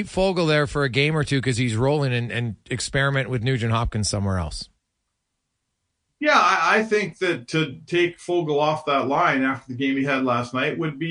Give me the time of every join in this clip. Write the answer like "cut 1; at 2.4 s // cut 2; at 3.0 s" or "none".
none